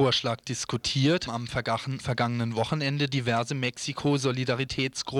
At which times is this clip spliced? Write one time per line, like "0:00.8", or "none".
0:01.3
0:02.0